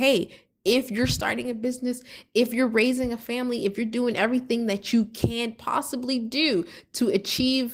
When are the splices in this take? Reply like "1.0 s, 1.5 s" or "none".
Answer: none